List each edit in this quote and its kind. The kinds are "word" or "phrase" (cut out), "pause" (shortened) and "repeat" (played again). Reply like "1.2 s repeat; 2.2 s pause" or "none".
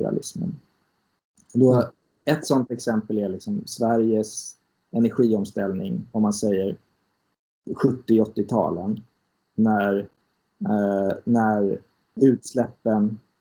none